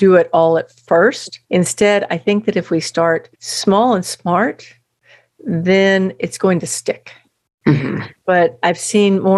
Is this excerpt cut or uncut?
cut